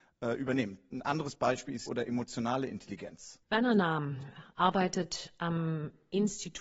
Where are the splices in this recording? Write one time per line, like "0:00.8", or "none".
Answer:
0:01.9
0:03.4